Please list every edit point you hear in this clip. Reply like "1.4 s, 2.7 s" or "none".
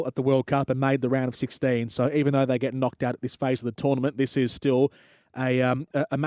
none